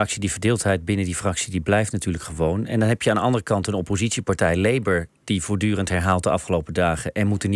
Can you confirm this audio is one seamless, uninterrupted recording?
yes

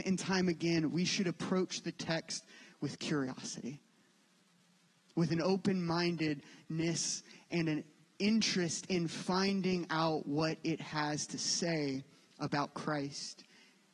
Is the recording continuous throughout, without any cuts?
yes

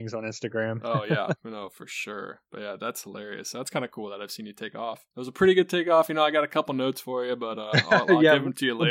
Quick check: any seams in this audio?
yes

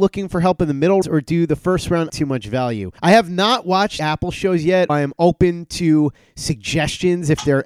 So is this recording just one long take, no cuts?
no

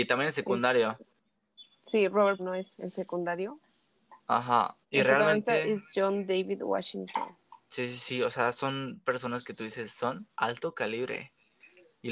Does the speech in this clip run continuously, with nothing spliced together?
no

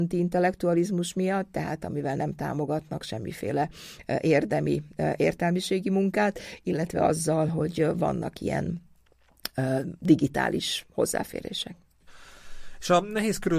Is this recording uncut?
yes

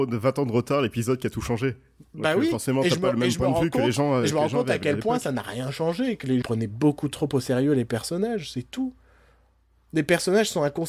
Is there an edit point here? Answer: yes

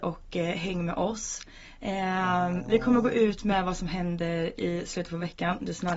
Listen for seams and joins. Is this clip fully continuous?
yes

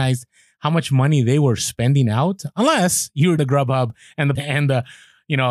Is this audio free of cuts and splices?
no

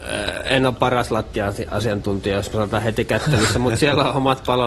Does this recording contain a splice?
no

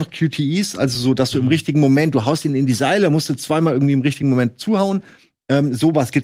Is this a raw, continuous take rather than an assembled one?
yes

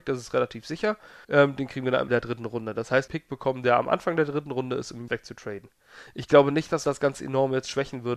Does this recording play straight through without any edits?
no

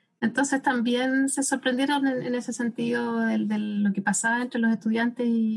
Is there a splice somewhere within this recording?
no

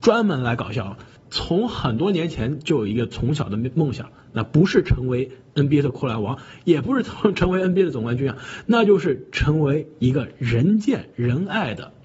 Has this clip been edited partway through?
no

